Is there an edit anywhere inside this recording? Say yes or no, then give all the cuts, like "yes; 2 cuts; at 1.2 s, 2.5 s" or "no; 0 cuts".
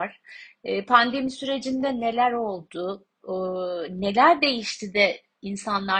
no; 0 cuts